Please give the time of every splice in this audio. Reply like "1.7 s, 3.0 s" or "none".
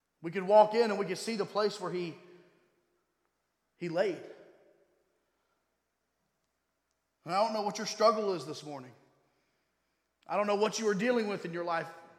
none